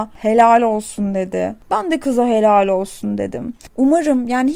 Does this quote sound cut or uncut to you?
uncut